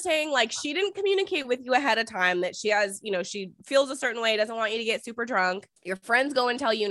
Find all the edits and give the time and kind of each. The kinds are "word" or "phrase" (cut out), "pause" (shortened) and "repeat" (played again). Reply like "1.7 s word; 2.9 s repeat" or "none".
3.6 s pause; 5.8 s pause